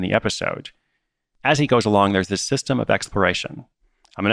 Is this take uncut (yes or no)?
yes